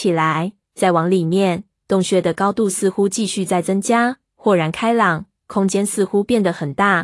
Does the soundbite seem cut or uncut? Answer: uncut